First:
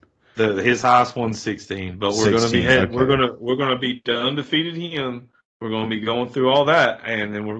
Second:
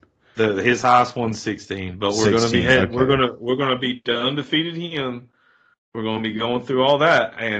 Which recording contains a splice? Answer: first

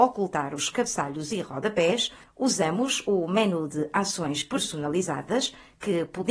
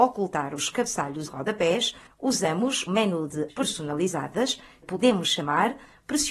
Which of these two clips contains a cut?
second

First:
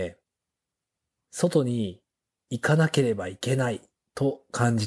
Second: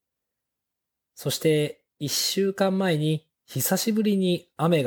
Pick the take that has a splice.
second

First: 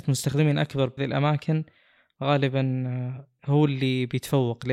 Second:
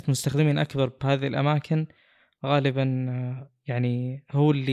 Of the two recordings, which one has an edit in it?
first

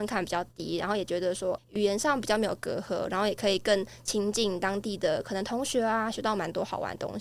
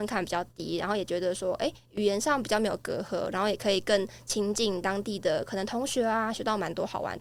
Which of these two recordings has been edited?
first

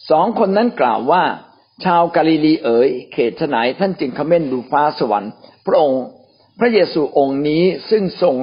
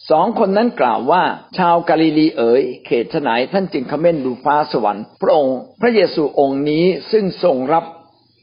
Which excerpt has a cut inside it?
second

